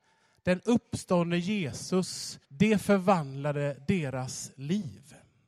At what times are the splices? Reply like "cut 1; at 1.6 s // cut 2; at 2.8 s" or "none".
cut 1; at 2.4 s